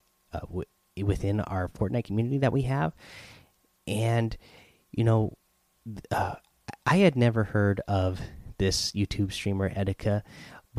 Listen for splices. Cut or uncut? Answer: uncut